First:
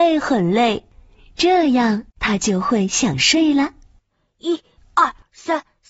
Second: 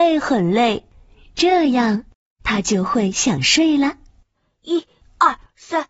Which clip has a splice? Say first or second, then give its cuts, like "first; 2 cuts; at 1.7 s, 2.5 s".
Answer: first; 1 cut; at 2.1 s